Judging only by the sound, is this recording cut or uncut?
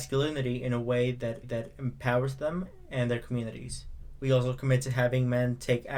cut